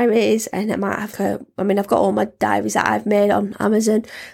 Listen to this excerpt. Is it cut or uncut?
cut